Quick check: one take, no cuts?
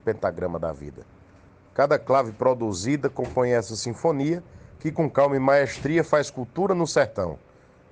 yes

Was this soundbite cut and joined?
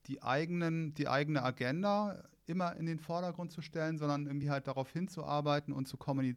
no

